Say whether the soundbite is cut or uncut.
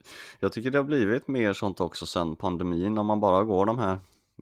uncut